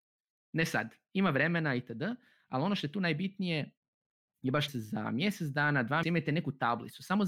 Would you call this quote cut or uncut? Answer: cut